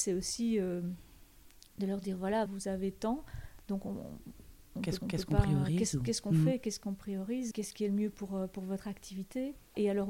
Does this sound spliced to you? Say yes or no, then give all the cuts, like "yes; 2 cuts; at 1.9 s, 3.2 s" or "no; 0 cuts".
yes; 3 cuts; at 2.5 s, 5.0 s, 7.5 s